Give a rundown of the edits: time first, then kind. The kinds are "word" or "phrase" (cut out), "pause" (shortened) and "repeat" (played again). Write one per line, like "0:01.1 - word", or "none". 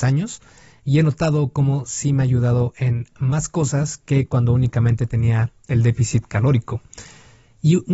none

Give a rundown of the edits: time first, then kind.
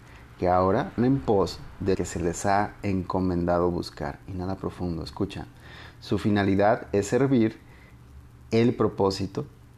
0:01.0 - word
0:01.9 - word

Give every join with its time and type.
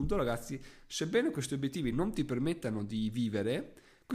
none

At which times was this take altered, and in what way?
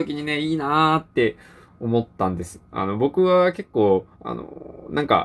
0:01.1 - pause
0:04.1 - pause

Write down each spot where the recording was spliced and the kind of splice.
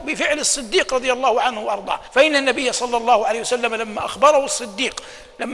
0:02.1 - pause

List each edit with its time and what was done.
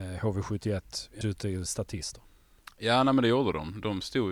0:01.2 - phrase

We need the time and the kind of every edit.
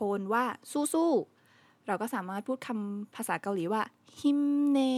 none

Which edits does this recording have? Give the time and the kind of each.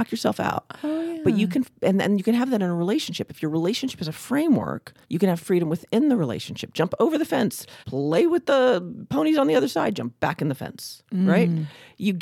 0:05.0 - pause
0:07.8 - pause

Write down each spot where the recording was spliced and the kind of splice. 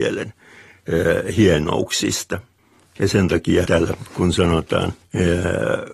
0:02.6 - pause
0:03.6 - word
0:05.0 - pause

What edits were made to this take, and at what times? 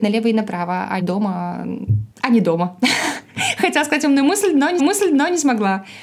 0:01.0 - word
0:02.1 - pause
0:04.8 - repeat

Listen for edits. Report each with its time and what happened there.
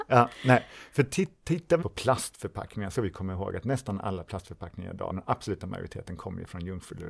0:01.8 - word
0:02.9 - word
0:05.1 - word

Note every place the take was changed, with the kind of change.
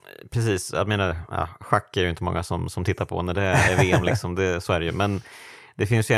none

